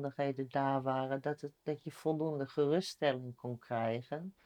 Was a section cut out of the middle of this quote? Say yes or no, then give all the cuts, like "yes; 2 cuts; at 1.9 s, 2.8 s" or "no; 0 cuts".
no; 0 cuts